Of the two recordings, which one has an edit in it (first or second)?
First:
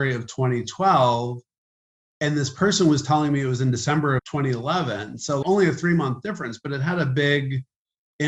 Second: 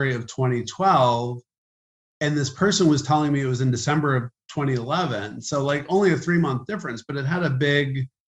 first